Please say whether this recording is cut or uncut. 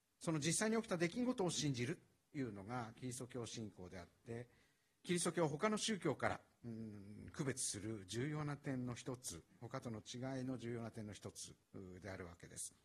cut